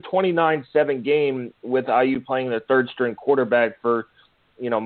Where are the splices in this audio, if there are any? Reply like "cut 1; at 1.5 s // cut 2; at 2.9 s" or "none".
none